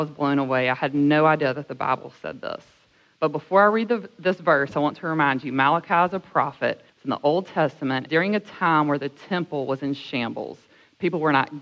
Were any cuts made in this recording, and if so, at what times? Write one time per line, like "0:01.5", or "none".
0:06.9
0:08.1